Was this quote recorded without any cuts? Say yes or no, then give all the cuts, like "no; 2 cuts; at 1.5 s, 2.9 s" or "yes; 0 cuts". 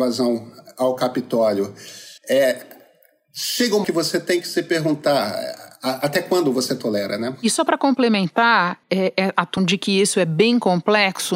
no; 5 cuts; at 2.2 s, 3.8 s, 5.7 s, 8.8 s, 9.6 s